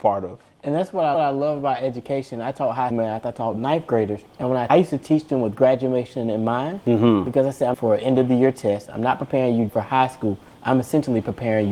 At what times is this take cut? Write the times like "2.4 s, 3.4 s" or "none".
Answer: 1.1 s, 2.9 s, 4.3 s, 4.7 s, 7.7 s, 9.7 s